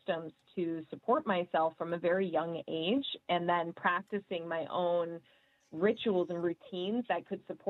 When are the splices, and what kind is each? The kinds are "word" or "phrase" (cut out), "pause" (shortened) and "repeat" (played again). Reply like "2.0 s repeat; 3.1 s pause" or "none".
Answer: none